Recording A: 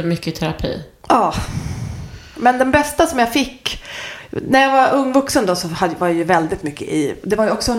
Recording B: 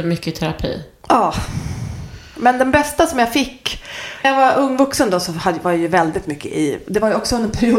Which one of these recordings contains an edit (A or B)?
B